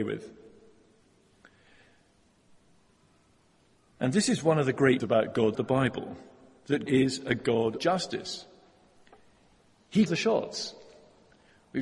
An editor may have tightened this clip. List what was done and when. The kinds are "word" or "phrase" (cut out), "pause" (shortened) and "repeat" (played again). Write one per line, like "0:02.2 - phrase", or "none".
0:05.0 - word
0:05.5 - word
0:06.9 - word
0:07.8 - word
0:10.1 - word